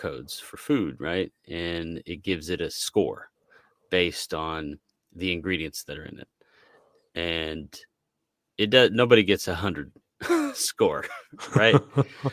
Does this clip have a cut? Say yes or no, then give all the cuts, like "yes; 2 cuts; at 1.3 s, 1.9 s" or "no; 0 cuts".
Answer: no; 0 cuts